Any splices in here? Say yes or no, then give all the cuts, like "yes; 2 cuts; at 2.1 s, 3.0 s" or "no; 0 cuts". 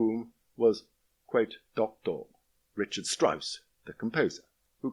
no; 0 cuts